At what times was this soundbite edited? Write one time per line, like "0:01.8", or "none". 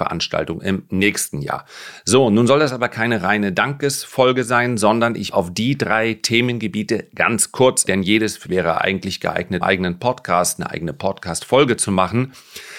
0:05.3
0:07.9
0:08.4
0:09.6